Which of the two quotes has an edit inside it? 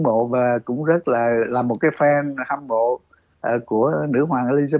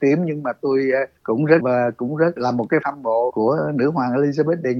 second; 5 cuts; at 1.2 s, 1.6 s, 2.4 s, 2.8 s, 3.3 s

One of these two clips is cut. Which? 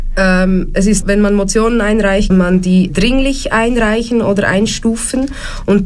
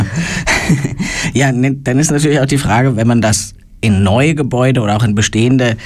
first; 3 cuts; at 1.0 s, 2.3 s, 2.9 s

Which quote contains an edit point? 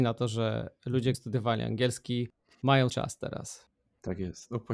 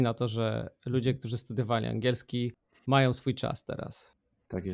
first; 2 cuts; at 1.1 s, 2.9 s

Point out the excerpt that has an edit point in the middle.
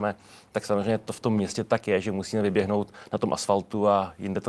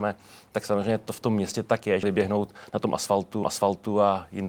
second; 2 cuts; at 2.0 s, 3.4 s

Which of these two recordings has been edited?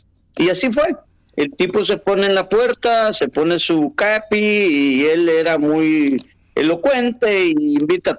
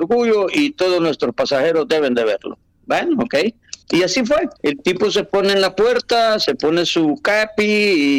second; 2 cuts; at 3.8 s, 4.6 s

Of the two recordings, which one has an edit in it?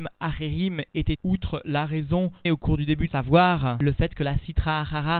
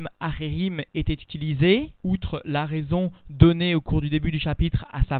first; 3 cuts; at 1.2 s, 2.5 s, 3.1 s

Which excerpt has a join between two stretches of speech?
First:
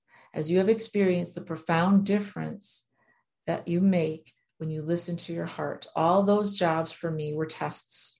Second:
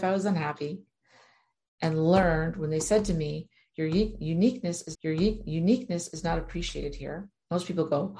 second; 1 cut; at 4.9 s

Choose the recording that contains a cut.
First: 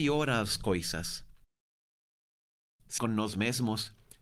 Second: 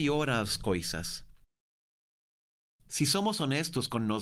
first; 1 cut; at 3.0 s

